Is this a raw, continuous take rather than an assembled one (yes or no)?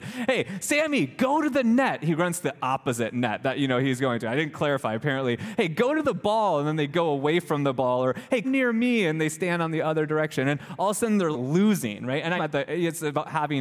no